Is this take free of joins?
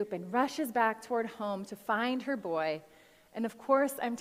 yes; 0 cuts

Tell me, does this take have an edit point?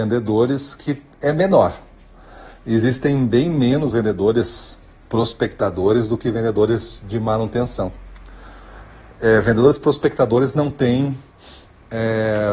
no; 0 cuts

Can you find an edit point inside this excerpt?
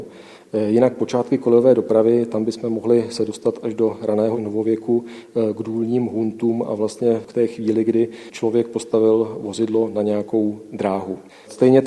no; 0 cuts

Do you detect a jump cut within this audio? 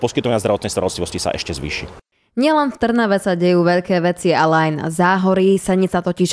no; 0 cuts

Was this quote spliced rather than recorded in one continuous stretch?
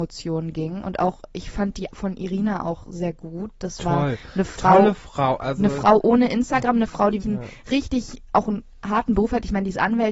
yes; 2 cuts; at 1.9 s, 7.2 s

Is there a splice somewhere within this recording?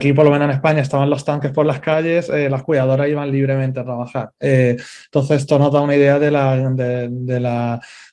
no; 0 cuts

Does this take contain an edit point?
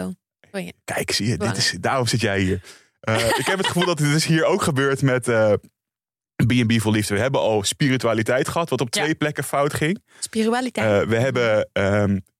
no; 0 cuts

